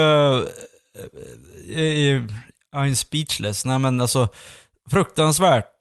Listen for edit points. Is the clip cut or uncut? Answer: uncut